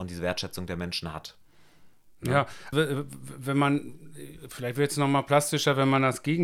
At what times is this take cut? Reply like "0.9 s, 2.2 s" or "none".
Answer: 2.7 s